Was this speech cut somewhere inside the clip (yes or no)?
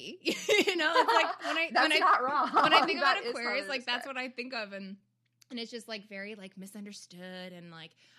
no